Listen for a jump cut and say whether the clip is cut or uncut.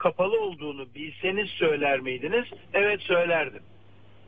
cut